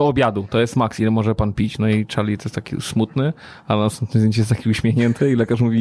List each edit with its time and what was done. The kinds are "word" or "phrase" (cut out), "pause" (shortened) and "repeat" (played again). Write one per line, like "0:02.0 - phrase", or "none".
none